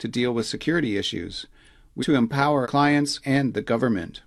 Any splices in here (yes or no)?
yes